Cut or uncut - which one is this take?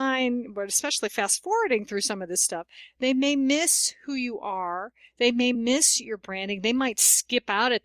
uncut